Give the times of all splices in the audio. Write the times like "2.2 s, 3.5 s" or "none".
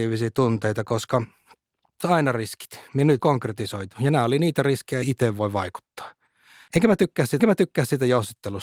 2.0 s, 2.9 s, 3.2 s, 5.0 s, 7.4 s